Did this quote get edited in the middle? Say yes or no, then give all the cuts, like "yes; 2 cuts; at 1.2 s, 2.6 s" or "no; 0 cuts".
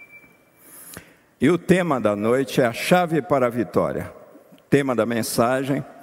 no; 0 cuts